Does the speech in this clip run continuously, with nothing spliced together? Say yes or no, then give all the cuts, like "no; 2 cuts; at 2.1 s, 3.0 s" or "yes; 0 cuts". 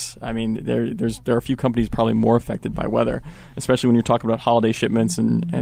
yes; 0 cuts